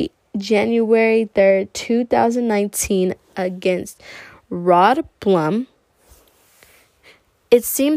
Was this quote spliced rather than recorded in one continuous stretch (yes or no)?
no